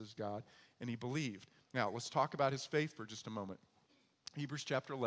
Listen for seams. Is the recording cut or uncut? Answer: uncut